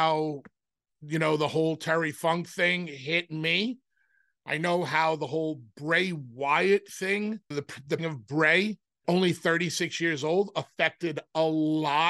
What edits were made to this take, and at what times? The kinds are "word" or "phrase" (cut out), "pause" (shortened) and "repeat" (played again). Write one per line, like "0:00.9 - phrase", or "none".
0:07.5 - word
0:08.0 - word
0:09.0 - word